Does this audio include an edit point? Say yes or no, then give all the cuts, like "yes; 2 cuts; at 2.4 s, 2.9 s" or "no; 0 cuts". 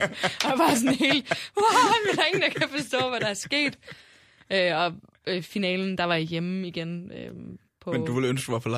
no; 0 cuts